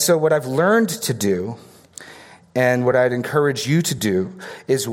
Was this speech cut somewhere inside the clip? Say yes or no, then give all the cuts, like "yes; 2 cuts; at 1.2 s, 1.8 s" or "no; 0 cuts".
no; 0 cuts